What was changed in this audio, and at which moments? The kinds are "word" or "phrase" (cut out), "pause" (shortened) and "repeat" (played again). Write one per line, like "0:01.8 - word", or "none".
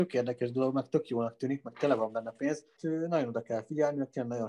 0:02.8 - phrase